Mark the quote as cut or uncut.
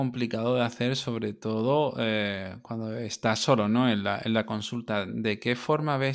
uncut